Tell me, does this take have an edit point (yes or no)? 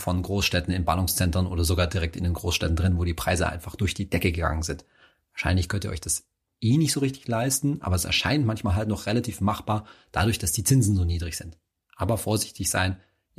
no